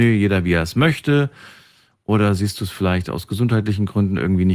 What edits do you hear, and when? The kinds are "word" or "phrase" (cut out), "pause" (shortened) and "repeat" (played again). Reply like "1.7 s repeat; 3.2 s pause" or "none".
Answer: none